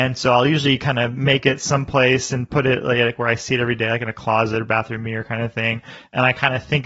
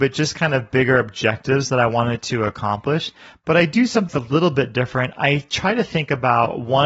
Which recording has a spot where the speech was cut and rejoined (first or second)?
second